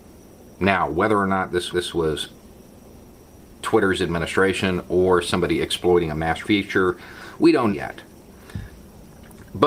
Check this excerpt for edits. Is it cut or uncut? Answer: cut